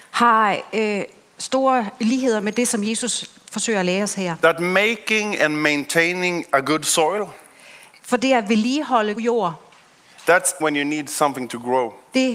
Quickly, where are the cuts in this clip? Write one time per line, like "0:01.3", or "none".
0:09.2
0:10.6